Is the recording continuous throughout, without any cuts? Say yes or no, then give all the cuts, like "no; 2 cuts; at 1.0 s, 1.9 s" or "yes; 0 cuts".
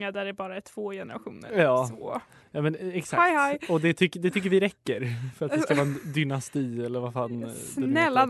yes; 0 cuts